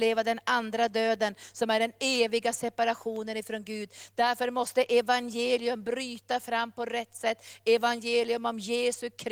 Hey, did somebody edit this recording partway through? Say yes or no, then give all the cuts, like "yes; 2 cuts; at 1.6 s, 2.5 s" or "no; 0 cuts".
no; 0 cuts